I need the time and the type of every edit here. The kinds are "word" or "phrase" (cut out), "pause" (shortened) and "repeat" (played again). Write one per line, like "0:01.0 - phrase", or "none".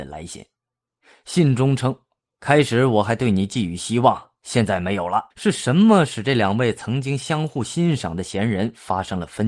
0:05.3 - pause